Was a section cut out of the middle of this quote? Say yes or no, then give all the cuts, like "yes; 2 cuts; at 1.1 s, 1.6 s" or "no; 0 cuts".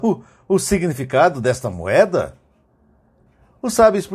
no; 0 cuts